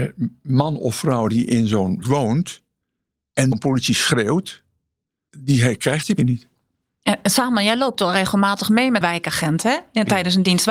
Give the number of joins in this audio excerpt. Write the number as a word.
four